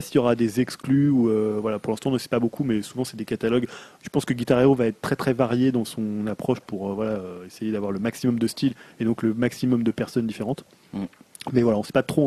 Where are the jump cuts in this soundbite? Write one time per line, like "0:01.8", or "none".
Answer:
none